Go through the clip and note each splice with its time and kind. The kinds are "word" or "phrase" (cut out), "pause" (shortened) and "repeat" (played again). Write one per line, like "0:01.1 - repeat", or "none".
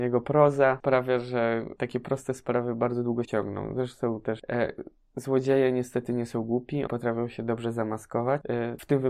0:01.8 - word
0:03.2 - word
0:06.9 - word